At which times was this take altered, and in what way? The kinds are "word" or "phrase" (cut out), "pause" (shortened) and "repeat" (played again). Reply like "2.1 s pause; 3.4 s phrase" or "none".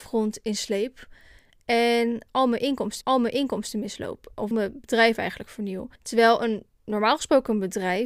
3.0 s repeat; 4.5 s word; 6.0 s pause